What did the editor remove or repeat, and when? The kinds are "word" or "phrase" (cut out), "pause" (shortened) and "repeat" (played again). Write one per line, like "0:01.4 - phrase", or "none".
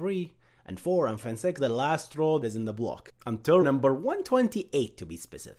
0:01.2 - word
0:01.6 - phrase
0:02.4 - word
0:03.6 - word